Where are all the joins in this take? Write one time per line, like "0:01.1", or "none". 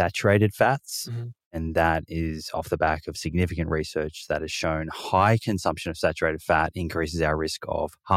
none